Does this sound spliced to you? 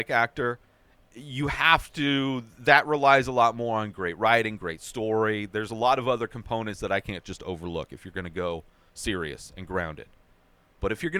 no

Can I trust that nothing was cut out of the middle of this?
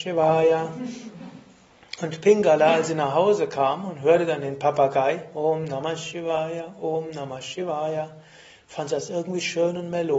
yes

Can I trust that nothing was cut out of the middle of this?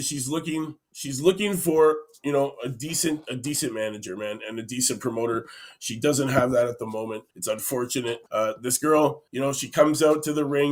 no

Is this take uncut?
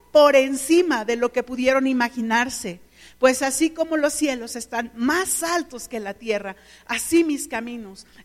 yes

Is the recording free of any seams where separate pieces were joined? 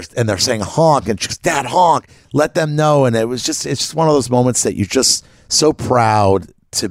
yes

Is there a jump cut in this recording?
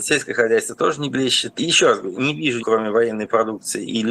yes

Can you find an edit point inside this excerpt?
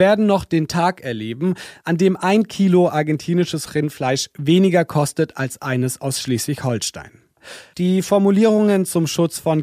no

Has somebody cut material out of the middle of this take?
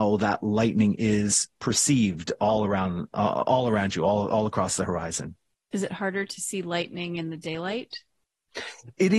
no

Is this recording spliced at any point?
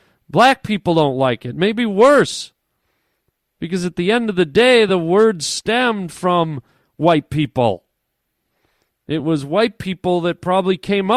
no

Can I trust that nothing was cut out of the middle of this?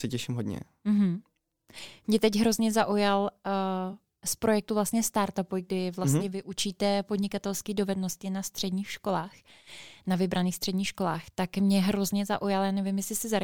yes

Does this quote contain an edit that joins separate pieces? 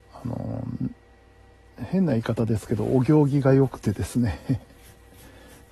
no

